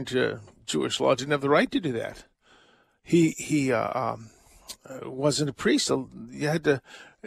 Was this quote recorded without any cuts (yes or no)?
yes